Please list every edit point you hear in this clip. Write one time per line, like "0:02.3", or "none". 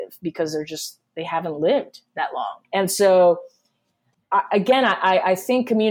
0:02.6
0:04.1